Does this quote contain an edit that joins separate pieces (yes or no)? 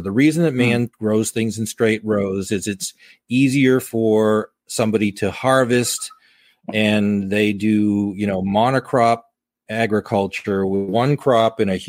yes